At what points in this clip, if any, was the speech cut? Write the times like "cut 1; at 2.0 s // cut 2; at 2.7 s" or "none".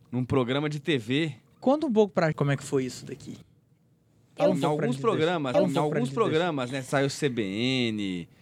cut 1; at 2.3 s // cut 2; at 5.5 s

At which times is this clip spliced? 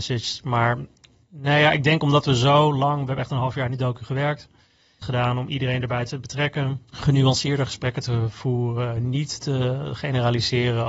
cut 1; at 5.0 s // cut 2; at 6.9 s

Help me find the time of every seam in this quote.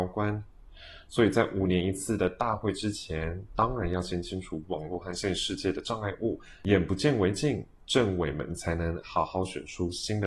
none

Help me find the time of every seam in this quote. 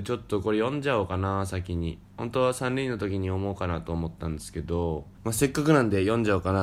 cut 1; at 2.1 s // cut 2; at 5.1 s

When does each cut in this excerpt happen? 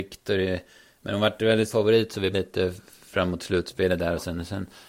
cut 1; at 1.7 s // cut 2; at 2.3 s

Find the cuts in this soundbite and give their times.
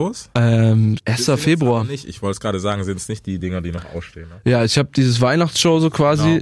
none

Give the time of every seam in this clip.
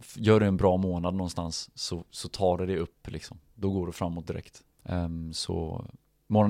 cut 1; at 4.7 s

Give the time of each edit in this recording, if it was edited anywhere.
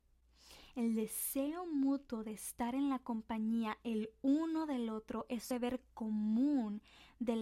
cut 1; at 5.5 s

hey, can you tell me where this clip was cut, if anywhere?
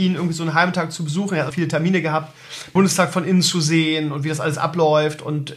cut 1; at 1.5 s // cut 2; at 2.8 s

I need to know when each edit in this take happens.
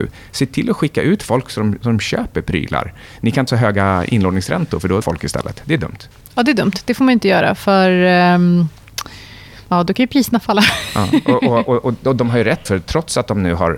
cut 1; at 3.5 s // cut 2; at 5.0 s // cut 3; at 12.7 s

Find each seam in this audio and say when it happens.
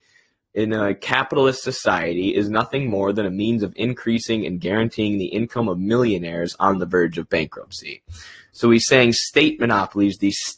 none

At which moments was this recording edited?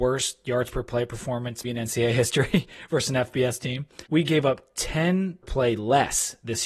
cut 1; at 1.6 s // cut 2; at 4.1 s // cut 3; at 5.4 s

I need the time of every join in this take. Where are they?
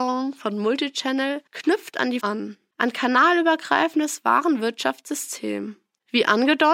cut 1; at 1.5 s // cut 2; at 2.2 s

